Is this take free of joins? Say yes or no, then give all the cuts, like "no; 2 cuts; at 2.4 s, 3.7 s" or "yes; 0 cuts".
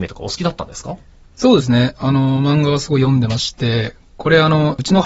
yes; 0 cuts